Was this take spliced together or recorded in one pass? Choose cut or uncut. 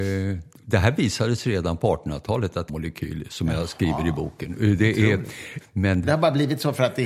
cut